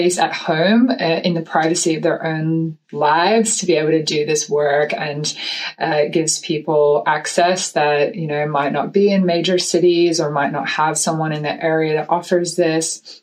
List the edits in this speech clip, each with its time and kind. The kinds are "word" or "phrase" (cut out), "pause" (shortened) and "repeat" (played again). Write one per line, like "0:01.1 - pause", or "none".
none